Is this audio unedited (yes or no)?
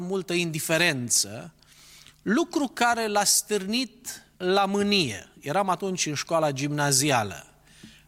no